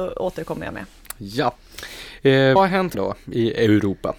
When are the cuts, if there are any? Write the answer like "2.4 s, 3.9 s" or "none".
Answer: 2.6 s, 2.9 s